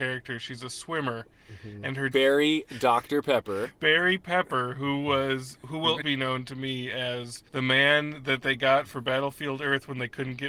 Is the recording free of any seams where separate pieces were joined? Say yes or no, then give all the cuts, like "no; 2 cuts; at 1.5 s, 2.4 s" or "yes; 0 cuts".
no; 3 cuts; at 2.1 s, 6.0 s, 7.5 s